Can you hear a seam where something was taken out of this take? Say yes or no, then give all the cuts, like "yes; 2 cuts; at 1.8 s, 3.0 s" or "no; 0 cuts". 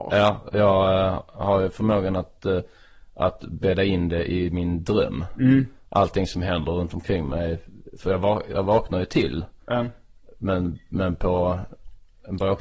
no; 0 cuts